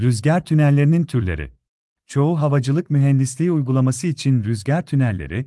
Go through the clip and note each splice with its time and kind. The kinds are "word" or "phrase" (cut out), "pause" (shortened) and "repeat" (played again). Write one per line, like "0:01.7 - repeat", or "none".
0:01.7 - pause